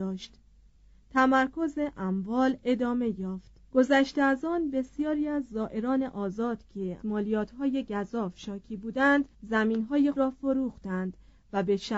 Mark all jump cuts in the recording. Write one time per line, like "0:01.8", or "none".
0:03.6
0:07.0
0:09.3
0:10.1

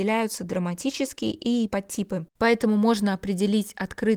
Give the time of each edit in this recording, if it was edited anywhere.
0:01.7

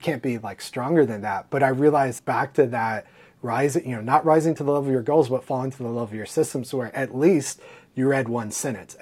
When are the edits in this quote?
0:02.2

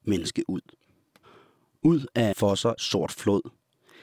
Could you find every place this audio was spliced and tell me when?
0:02.3
0:02.8

